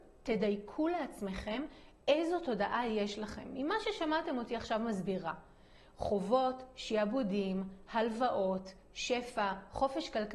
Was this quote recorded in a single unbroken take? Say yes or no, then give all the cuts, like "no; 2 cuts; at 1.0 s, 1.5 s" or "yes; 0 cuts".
yes; 0 cuts